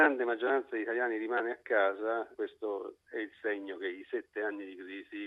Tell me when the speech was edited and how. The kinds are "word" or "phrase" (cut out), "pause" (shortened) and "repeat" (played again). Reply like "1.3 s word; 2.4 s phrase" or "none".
none